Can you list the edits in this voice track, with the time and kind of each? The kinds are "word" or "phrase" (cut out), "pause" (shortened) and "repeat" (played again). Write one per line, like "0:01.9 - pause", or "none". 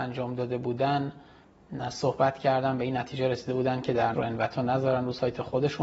0:04.1 - word